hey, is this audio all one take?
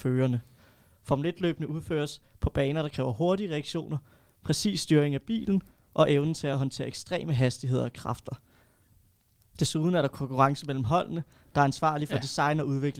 yes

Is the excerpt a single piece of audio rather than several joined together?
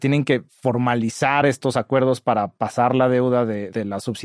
yes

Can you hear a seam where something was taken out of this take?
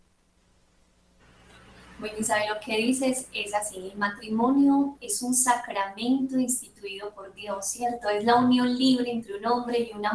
no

